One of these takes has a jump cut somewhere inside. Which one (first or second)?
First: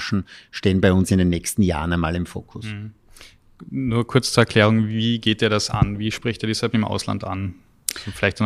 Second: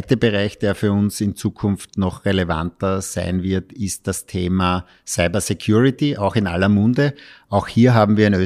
first